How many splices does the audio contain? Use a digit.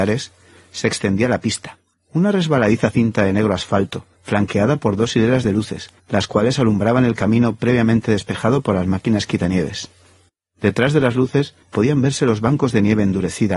5